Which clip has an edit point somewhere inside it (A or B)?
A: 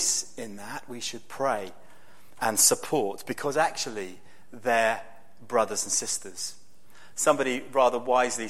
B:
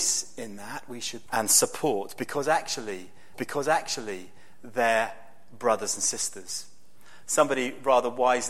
B